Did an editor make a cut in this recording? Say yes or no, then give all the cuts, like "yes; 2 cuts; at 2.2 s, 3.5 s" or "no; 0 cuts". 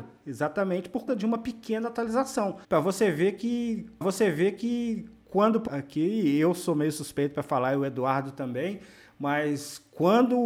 yes; 4 cuts; at 1.1 s, 2.6 s, 4.0 s, 5.7 s